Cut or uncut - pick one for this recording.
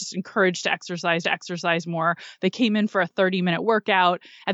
cut